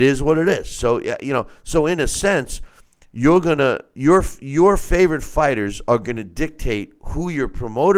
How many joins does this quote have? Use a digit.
0